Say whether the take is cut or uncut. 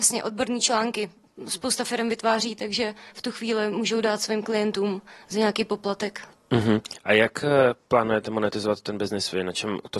uncut